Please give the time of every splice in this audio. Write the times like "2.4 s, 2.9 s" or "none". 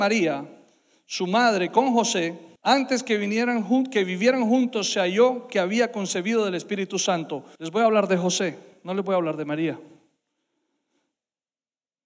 2.6 s, 7.6 s